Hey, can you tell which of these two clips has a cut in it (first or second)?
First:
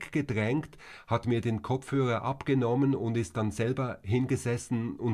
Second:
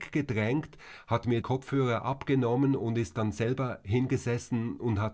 second